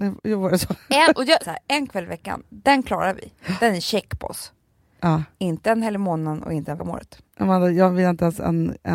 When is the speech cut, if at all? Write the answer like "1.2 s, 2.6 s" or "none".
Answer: 1.4 s, 5.3 s, 6.8 s, 7.3 s